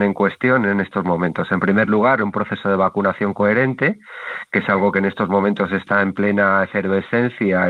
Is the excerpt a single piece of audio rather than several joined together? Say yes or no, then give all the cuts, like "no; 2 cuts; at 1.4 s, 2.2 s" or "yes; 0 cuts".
yes; 0 cuts